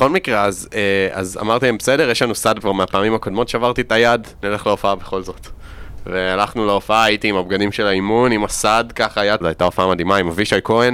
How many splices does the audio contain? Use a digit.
3